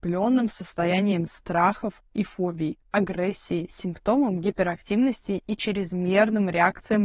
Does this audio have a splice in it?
no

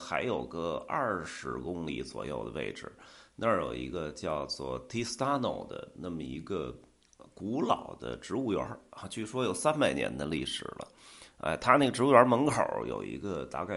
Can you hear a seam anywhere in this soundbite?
no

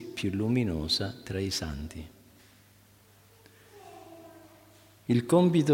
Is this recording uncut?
yes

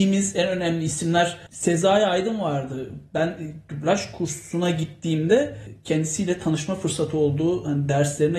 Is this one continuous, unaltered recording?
yes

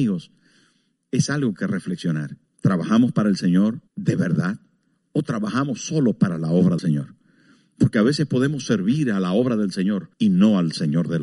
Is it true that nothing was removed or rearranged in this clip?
no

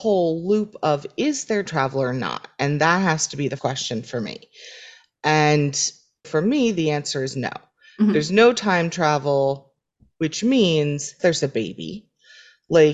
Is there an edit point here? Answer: yes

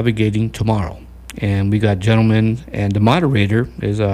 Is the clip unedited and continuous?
yes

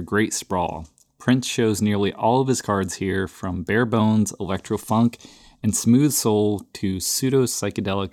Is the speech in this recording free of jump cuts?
yes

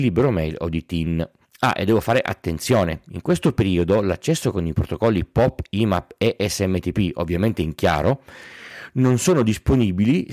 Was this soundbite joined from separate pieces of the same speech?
yes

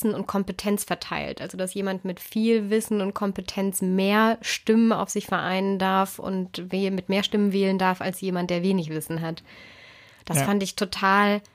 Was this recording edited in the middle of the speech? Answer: no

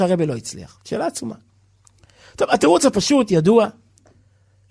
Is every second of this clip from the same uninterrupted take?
yes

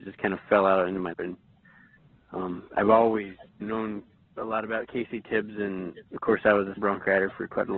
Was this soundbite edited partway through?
yes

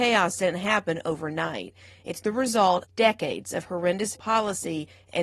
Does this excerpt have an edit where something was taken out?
yes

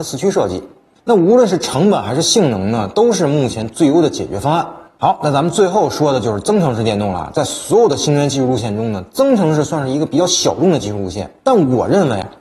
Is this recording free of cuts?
no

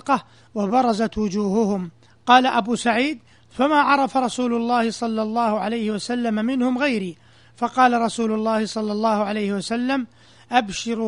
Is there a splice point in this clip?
no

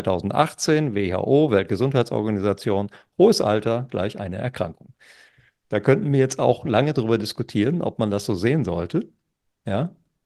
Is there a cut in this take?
no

